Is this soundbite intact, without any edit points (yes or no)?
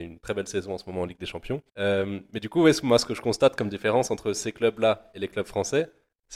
no